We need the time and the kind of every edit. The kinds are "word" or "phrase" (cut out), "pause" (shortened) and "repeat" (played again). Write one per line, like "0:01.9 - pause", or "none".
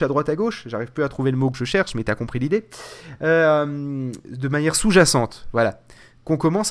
none